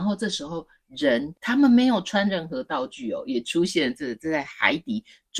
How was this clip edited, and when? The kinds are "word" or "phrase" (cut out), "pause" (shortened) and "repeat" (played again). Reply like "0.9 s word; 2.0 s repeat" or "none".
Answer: 1.4 s pause